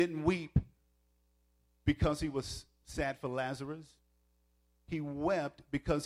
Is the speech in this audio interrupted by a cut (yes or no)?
no